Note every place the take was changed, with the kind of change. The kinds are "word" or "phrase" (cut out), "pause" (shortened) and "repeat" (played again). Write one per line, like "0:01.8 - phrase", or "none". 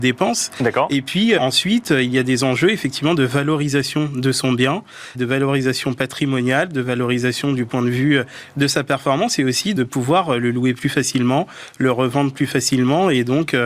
0:01.4 - word
0:05.1 - word
0:09.8 - word